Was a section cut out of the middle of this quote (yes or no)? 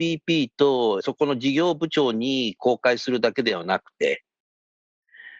no